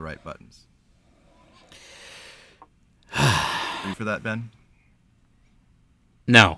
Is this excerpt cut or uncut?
cut